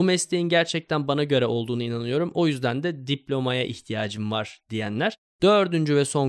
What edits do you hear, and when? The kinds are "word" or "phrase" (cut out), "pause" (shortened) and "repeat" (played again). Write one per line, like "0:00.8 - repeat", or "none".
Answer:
none